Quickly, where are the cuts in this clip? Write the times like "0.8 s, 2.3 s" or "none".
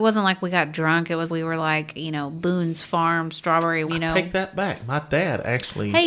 1.3 s, 3.9 s